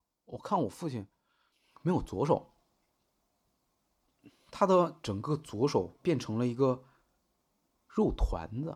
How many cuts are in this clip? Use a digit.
1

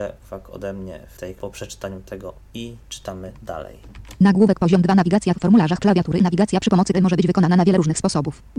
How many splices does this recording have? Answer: 5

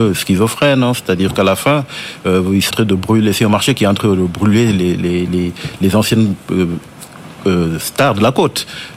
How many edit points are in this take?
1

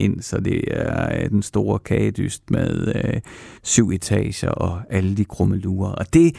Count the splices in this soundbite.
1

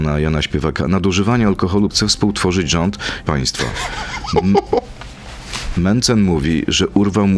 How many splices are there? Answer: 2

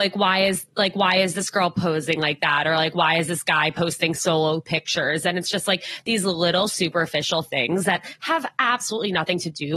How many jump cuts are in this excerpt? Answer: 0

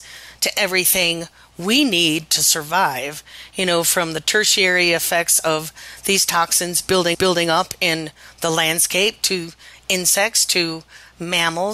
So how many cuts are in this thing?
1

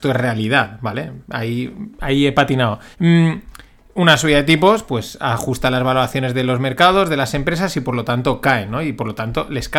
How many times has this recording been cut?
1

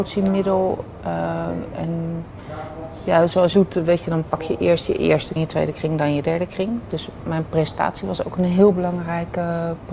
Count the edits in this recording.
3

